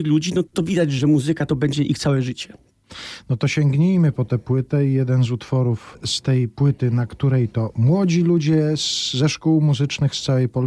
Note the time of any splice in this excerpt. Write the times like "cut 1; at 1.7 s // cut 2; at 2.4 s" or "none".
none